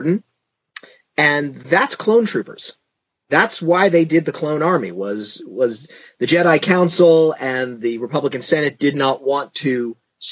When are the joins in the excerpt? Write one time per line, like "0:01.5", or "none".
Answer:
none